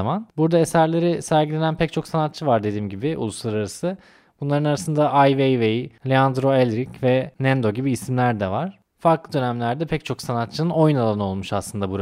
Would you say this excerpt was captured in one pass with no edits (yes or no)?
yes